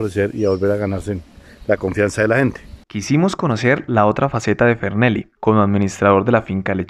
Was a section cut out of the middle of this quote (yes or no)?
yes